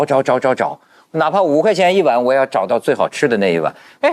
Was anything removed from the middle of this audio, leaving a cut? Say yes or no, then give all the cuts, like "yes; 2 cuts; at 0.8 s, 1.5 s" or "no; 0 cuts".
no; 0 cuts